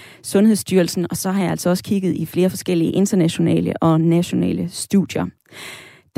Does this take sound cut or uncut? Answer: uncut